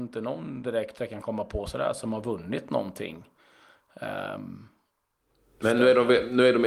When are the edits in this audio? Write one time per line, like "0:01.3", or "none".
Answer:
none